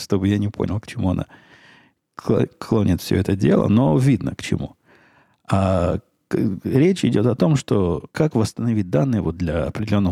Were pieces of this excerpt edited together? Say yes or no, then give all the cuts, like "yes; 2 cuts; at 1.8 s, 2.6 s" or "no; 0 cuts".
yes; 1 cut; at 8.1 s